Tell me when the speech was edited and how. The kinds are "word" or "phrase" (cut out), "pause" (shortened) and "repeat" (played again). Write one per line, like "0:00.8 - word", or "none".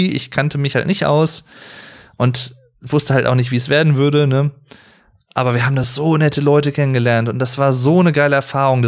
none